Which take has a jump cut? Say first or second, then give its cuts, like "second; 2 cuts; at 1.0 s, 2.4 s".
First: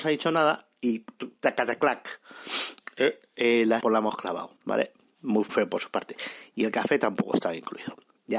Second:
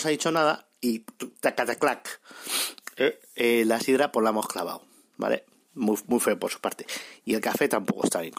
first; 3 cuts; at 3.8 s, 4.6 s, 5.5 s